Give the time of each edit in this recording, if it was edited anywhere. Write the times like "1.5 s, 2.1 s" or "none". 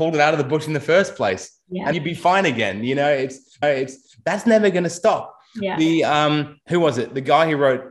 1.9 s, 3.6 s, 6.6 s